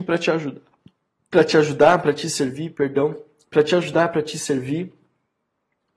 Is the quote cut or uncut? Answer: uncut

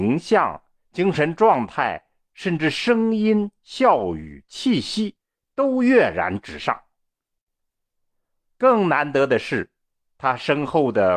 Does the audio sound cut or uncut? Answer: uncut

